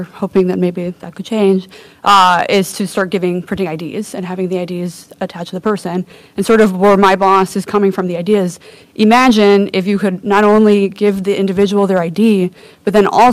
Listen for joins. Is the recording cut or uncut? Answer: uncut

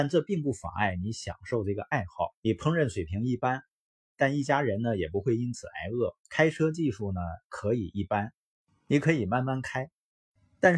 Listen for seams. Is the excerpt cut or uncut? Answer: cut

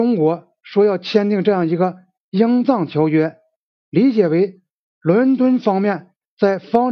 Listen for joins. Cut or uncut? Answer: uncut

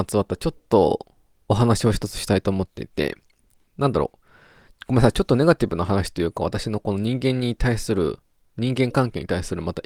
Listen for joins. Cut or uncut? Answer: uncut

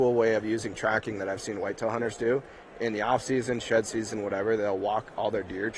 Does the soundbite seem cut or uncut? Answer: uncut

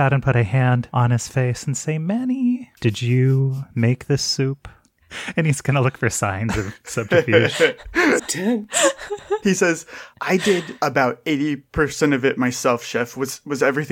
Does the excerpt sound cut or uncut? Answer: cut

